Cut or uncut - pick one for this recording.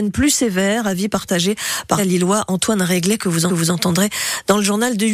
cut